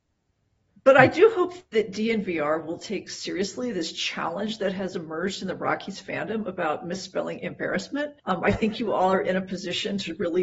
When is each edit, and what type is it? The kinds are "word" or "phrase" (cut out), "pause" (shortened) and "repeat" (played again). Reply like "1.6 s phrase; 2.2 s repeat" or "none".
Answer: 8.2 s pause